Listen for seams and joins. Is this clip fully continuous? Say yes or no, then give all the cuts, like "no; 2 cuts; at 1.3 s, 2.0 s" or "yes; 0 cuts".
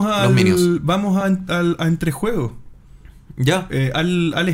yes; 0 cuts